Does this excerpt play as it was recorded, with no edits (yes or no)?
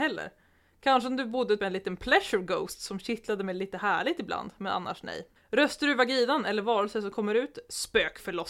no